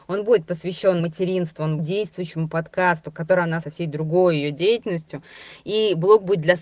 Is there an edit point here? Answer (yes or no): yes